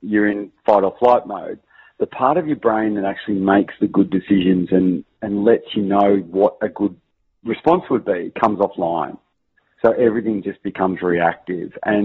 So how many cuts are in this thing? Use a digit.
0